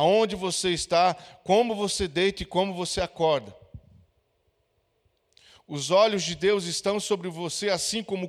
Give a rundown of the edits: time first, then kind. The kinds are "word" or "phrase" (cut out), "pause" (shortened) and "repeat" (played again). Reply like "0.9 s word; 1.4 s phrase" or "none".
none